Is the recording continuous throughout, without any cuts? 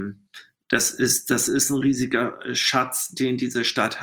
yes; 0 cuts

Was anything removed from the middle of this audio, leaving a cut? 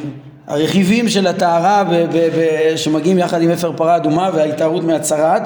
no; 0 cuts

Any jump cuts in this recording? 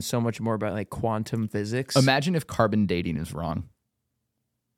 no; 0 cuts

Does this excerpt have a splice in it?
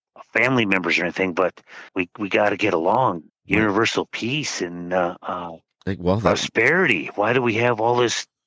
yes; 2 cuts; at 1.9 s, 3.3 s

